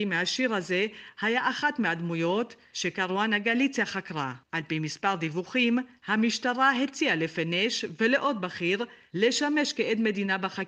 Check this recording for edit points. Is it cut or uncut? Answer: cut